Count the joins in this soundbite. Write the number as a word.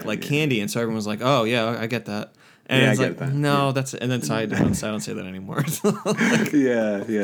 zero